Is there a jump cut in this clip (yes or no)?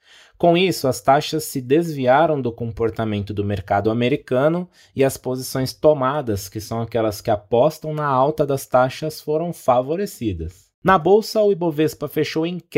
no